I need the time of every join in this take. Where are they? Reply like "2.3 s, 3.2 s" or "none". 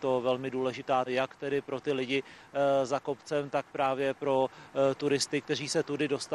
1.1 s